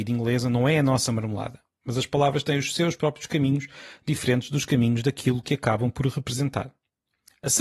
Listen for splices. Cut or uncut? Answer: uncut